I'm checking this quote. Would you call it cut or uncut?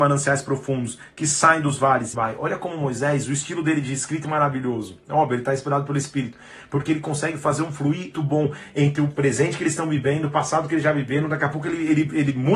cut